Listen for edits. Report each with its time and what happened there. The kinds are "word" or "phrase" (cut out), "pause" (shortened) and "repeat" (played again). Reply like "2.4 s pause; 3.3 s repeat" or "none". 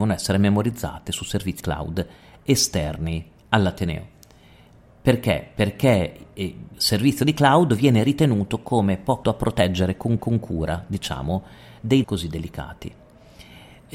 1.6 s word; 3.4 s pause; 6.7 s word; 9.2 s word; 10.2 s repeat; 12.0 s word